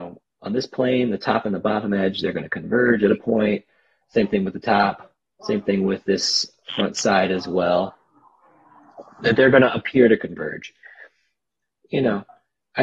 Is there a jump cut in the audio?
no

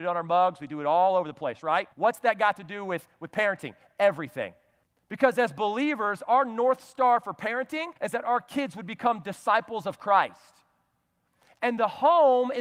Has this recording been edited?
yes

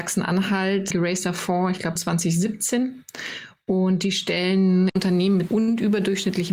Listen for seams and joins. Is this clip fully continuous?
no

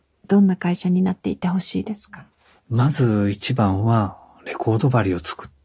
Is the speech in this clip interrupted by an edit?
no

